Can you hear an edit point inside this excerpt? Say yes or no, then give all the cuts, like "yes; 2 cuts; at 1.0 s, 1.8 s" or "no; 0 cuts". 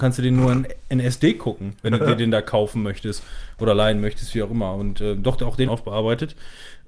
yes; 1 cut; at 5.7 s